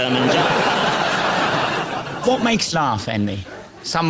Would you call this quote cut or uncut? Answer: cut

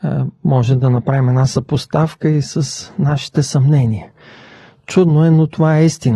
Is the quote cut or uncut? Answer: uncut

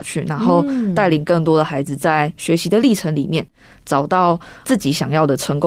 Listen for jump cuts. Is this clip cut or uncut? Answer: uncut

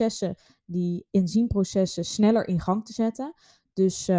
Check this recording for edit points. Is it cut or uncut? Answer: cut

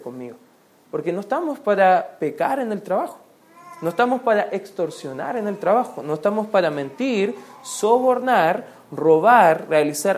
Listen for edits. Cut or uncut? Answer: uncut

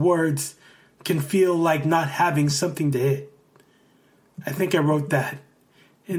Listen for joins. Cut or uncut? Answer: uncut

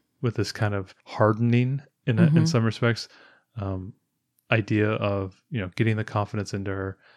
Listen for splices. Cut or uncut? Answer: cut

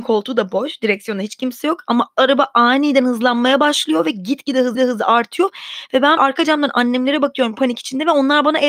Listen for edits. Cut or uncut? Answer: cut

